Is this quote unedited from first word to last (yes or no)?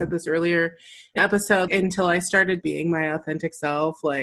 no